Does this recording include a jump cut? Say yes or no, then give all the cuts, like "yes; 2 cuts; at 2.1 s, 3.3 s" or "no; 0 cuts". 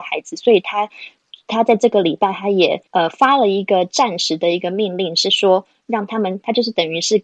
yes; 1 cut; at 2.9 s